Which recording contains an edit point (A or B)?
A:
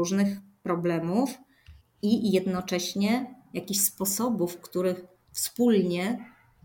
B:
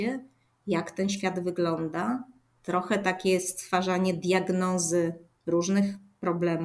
A